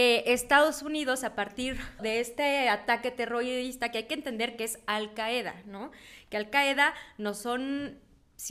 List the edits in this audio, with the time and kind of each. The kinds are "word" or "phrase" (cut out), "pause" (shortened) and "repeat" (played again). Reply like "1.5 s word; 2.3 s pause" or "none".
2.0 s word